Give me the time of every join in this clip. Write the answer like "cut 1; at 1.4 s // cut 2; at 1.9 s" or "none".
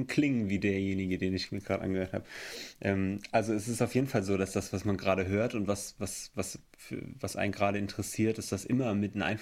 none